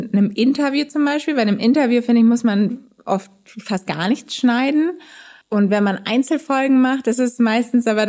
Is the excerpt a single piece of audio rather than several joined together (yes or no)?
yes